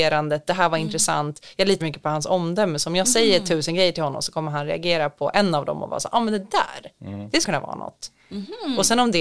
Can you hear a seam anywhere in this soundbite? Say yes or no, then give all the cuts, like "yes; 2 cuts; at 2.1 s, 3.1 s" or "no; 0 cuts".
yes; 2 cuts; at 1.8 s, 7.4 s